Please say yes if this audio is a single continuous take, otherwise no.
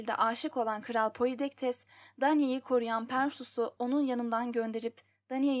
yes